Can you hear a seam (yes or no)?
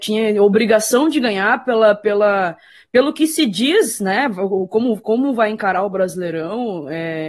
no